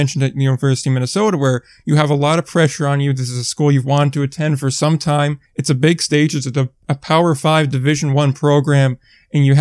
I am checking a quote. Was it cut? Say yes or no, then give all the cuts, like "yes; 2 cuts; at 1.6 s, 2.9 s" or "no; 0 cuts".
yes; 1 cut; at 5.4 s